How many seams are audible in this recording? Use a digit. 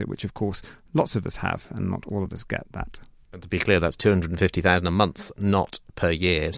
0